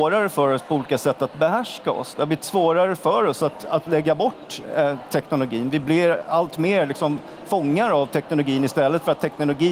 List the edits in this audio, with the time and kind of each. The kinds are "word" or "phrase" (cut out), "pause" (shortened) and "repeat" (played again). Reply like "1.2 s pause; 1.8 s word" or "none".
none